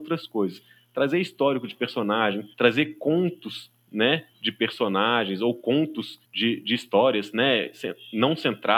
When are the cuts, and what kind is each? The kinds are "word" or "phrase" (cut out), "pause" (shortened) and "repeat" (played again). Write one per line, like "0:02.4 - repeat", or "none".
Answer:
0:02.5 - pause
0:04.3 - pause
0:06.2 - pause